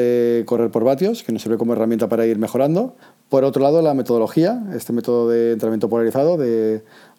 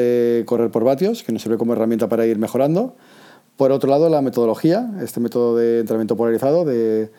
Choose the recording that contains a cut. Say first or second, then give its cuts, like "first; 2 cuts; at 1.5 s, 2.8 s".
first; 1 cut; at 3.0 s